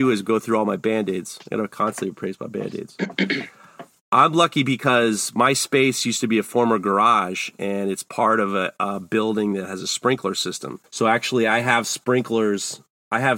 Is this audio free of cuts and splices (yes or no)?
no